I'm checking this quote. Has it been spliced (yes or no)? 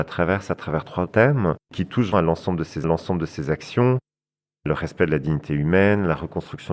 yes